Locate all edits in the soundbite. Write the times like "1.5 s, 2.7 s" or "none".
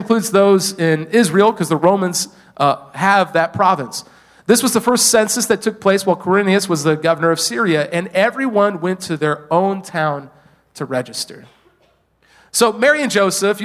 none